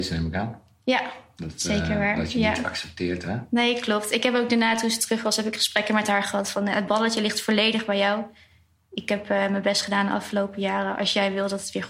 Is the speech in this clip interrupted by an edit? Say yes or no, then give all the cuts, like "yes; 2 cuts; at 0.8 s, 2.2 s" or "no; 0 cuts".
no; 0 cuts